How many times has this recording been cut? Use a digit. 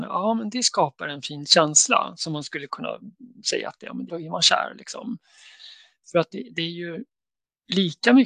1